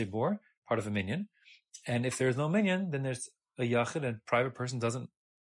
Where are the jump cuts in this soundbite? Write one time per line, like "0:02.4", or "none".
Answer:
none